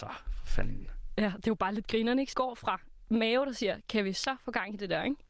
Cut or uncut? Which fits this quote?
cut